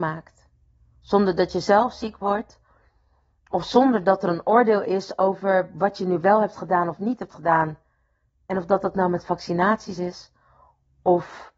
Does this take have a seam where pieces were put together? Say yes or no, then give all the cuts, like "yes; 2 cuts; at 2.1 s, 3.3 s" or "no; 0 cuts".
no; 0 cuts